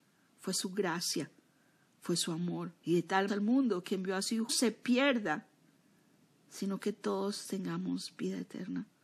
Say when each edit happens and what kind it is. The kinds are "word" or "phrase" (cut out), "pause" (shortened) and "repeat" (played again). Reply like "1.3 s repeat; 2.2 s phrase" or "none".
2.8 s pause; 3.3 s phrase; 4.5 s phrase